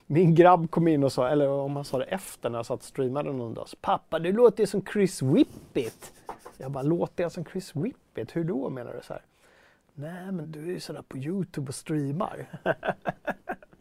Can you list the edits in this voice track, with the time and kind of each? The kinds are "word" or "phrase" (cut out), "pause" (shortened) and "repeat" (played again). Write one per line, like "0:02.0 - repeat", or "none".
0:06.5 - pause
0:10.4 - word